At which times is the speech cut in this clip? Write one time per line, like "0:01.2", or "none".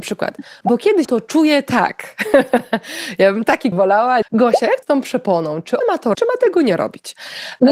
0:01.0
0:03.7
0:04.2
0:04.8
0:05.8
0:06.1